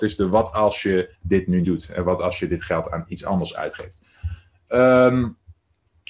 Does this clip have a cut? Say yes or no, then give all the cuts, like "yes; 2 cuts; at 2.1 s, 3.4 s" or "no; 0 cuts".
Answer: yes; 2 cuts; at 1.1 s, 1.6 s